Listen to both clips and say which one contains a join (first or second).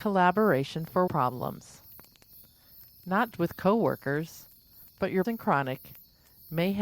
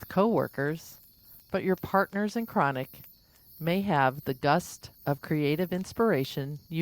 first